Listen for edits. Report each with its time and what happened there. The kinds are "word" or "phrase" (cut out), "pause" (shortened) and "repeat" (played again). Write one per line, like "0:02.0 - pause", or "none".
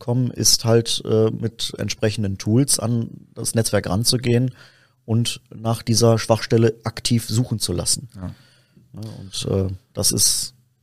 none